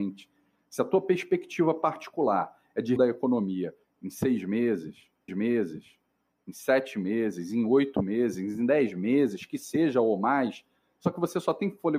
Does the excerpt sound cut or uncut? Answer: cut